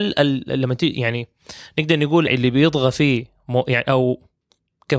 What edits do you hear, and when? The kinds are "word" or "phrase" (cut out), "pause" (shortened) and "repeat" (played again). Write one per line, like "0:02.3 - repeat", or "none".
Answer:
0:02.3 - phrase